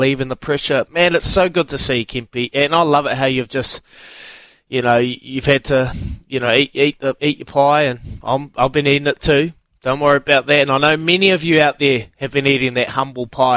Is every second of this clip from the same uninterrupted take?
yes; 0 cuts

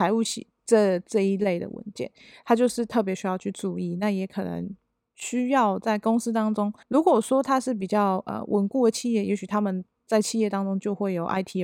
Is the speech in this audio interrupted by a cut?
yes; 1 cut; at 6.8 s

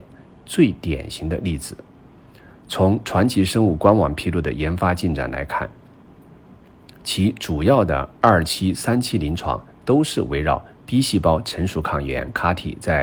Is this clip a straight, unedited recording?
yes; 0 cuts

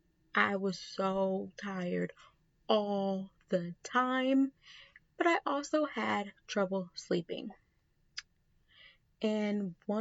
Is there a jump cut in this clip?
no; 0 cuts

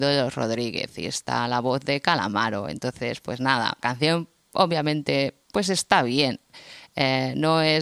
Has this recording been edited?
yes; 2 cuts; at 3.8 s, 5.4 s

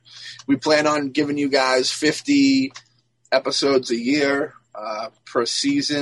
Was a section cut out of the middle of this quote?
no; 0 cuts

